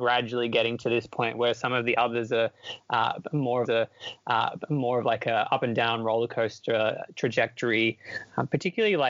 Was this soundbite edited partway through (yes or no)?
yes